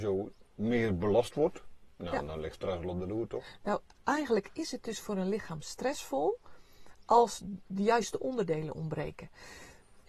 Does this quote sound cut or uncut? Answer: uncut